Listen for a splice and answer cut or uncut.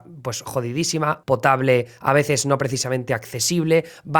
cut